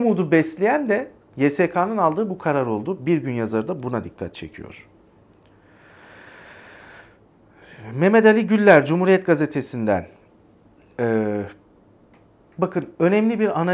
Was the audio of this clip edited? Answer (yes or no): no